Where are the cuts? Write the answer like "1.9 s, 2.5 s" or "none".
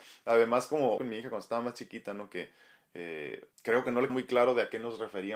1.0 s, 3.5 s, 4.1 s